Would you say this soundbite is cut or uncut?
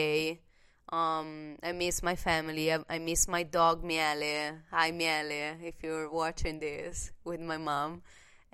uncut